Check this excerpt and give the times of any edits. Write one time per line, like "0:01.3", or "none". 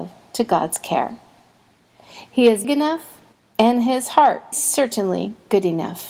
0:02.6
0:03.3
0:04.5